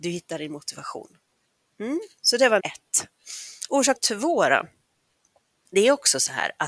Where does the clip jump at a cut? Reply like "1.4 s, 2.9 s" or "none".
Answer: 2.2 s, 2.6 s, 3.9 s